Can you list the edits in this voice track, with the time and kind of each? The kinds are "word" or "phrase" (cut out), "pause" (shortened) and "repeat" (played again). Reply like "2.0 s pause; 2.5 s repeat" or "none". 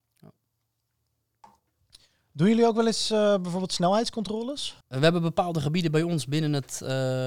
4.8 s pause